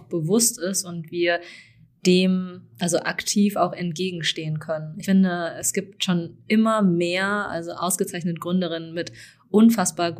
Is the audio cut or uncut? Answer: uncut